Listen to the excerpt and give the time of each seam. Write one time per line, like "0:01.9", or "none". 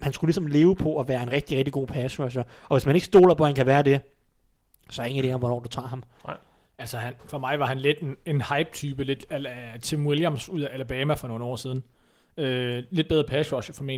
none